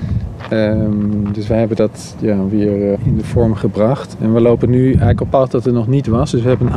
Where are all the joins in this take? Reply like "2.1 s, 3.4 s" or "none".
3.0 s, 5.3 s